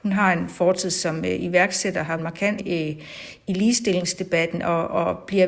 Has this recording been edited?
yes; 2 cuts; at 2.2 s, 2.6 s

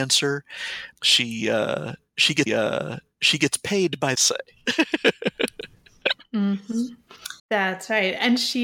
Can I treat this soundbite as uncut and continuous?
no; 4 cuts; at 0.9 s, 2.5 s, 4.2 s, 7.4 s

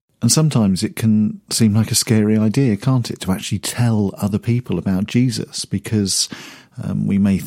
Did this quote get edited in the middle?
no; 0 cuts

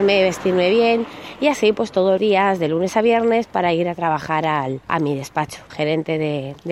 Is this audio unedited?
no; 3 cuts; at 2.2 s, 4.8 s, 5.7 s

